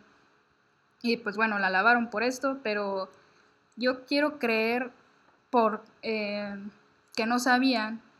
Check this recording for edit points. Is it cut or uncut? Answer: uncut